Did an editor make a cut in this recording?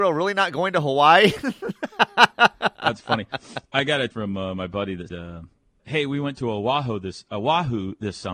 yes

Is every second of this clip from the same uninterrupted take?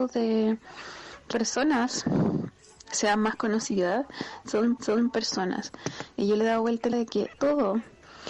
no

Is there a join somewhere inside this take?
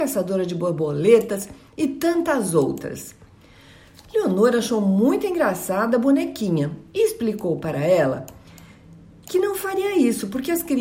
no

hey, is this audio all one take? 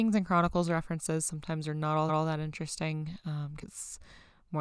no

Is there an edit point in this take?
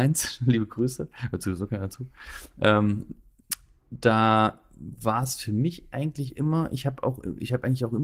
no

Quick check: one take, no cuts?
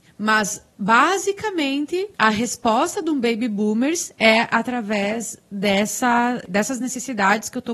yes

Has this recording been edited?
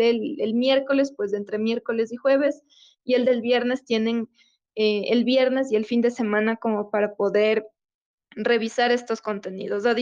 no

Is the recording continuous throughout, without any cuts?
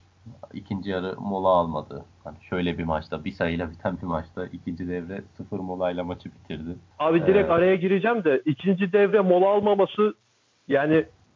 no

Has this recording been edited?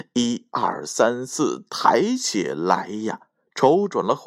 no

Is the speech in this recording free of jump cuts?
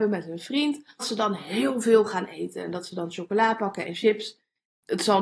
no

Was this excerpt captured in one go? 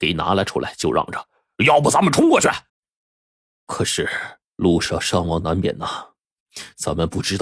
no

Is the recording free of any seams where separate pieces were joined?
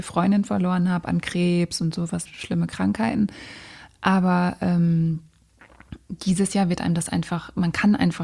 no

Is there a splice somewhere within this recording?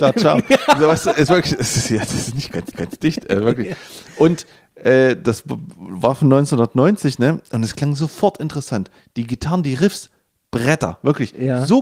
yes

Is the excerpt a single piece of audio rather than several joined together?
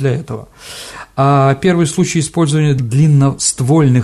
yes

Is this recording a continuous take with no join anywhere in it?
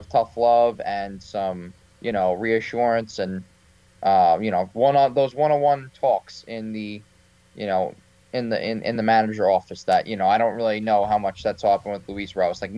yes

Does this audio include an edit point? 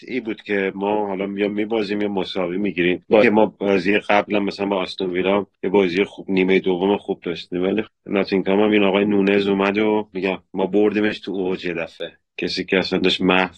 yes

